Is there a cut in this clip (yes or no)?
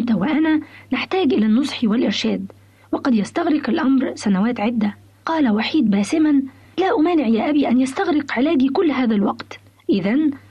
no